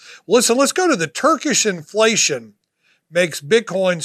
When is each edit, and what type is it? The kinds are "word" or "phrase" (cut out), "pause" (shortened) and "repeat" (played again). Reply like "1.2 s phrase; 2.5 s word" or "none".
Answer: none